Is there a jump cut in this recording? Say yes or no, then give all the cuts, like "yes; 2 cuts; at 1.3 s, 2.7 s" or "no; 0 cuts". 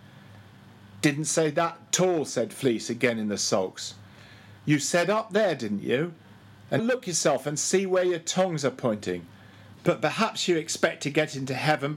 yes; 1 cut; at 6.8 s